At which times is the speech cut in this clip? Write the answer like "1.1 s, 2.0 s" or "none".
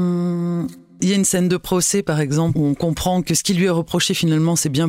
none